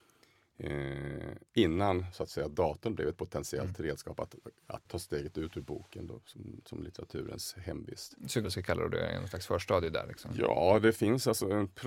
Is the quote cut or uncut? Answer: cut